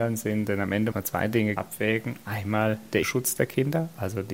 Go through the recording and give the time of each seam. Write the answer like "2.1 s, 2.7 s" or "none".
0.9 s, 1.6 s, 3.0 s

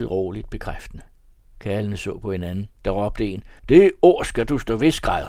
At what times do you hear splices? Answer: 1.4 s, 2.8 s, 3.6 s

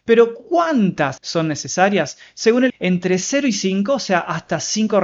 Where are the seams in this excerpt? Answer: 1.2 s, 2.7 s

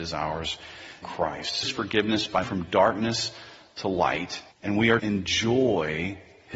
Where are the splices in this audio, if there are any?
1.0 s, 1.6 s, 2.4 s, 4.5 s, 5.0 s

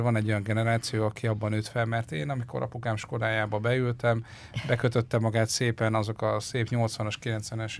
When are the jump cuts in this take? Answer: none

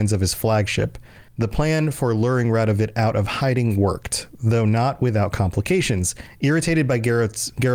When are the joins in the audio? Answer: 1.3 s

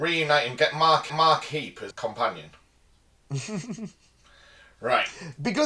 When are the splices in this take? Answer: 1.1 s, 1.9 s

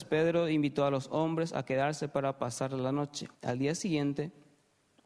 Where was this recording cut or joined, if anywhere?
3.3 s

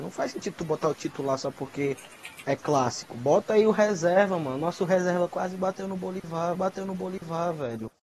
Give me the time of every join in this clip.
0.9 s, 2.4 s, 6.5 s

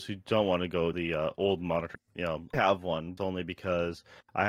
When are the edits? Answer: 0.9 s, 2.0 s, 2.5 s, 3.2 s

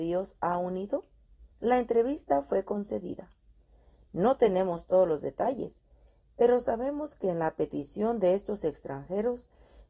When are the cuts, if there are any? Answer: 1.5 s

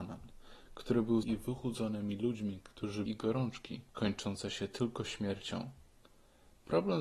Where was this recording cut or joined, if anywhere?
1.2 s, 3.1 s, 3.9 s

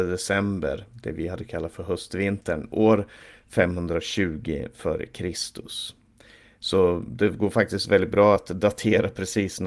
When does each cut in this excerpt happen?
none

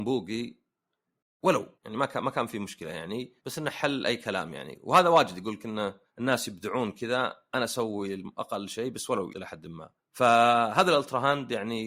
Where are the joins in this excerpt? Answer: 1.8 s, 3.4 s, 6.1 s, 9.3 s, 10.0 s

